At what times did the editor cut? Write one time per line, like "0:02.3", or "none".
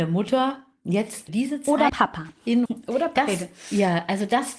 0:01.3
0:01.9
0:02.7